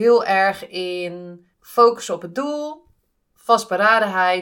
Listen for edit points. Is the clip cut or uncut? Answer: cut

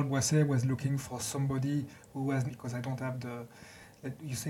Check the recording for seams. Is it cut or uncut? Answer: cut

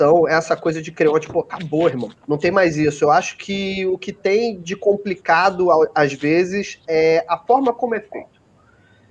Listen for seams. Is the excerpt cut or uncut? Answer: cut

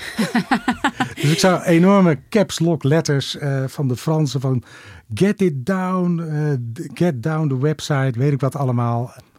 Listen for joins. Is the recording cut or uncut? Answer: uncut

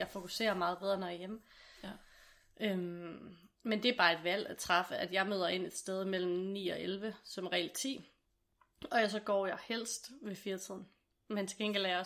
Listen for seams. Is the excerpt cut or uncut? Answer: uncut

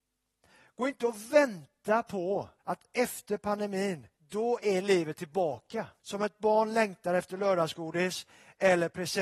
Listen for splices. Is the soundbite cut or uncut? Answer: cut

